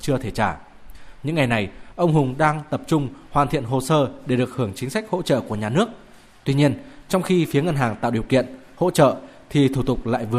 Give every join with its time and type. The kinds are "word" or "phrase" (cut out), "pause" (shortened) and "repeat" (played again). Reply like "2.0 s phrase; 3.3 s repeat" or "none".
none